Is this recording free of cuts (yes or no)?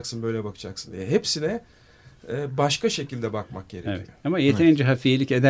yes